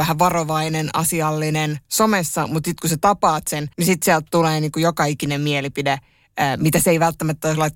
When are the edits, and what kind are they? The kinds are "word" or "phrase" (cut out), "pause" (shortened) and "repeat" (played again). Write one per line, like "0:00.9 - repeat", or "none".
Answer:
0:03.7 - pause